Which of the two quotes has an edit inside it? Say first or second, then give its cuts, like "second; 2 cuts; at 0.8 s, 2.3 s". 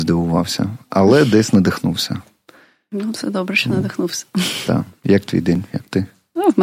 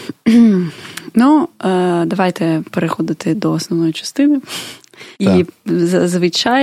second; 1 cut; at 5.1 s